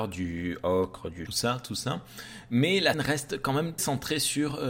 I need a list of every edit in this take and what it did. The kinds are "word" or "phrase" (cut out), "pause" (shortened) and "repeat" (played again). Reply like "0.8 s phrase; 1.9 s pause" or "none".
1.3 s phrase; 2.9 s word; 3.8 s word